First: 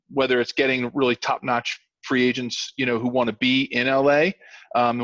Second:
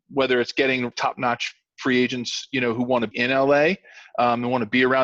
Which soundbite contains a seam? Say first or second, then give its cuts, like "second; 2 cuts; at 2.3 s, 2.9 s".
second; 2 cuts; at 0.9 s, 3.1 s